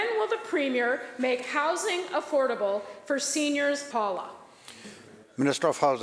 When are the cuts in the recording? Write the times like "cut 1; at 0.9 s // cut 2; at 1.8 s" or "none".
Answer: cut 1; at 3.9 s